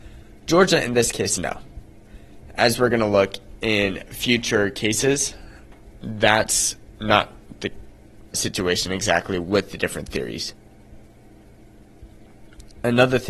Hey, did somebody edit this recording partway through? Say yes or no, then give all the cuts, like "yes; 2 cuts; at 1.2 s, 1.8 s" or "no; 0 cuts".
yes; 2 cuts; at 1.4 s, 8.3 s